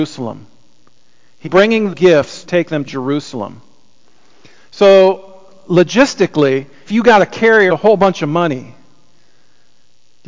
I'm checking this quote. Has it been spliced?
yes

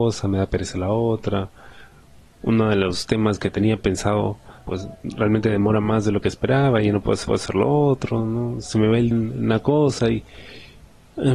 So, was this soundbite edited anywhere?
yes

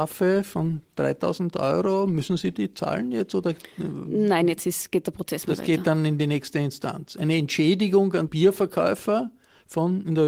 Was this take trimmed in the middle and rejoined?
yes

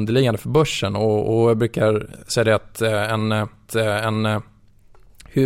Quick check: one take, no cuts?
no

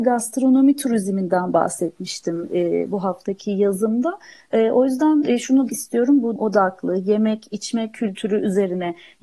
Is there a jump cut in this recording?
yes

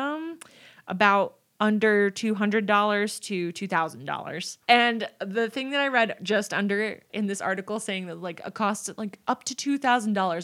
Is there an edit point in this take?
yes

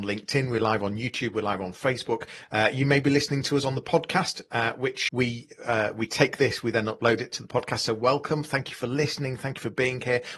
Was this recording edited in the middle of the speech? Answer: yes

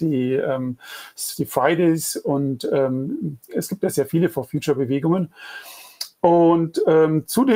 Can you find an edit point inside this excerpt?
no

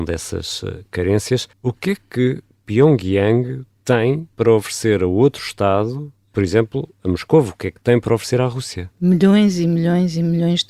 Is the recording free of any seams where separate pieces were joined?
no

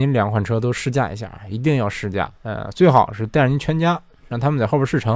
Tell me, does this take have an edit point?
yes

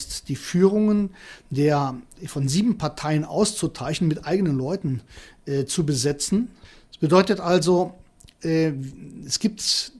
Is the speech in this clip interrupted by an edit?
no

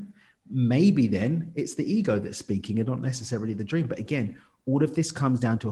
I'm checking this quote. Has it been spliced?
no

